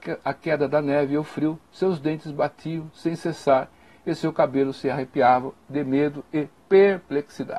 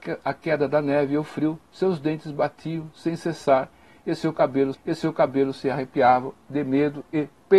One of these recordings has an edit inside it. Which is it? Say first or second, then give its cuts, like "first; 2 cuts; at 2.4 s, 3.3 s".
second; 1 cut; at 4.7 s